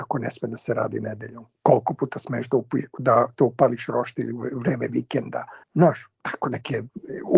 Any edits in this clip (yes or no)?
yes